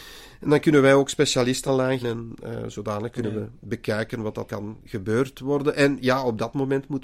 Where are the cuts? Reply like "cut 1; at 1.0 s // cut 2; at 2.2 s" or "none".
cut 1; at 1.7 s // cut 2; at 2.0 s // cut 3; at 4.5 s